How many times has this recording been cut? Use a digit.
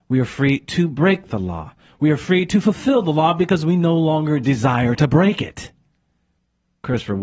0